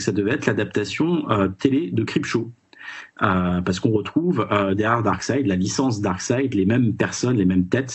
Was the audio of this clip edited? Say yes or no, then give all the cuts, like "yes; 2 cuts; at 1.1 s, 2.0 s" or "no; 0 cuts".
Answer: yes; 1 cut; at 3.1 s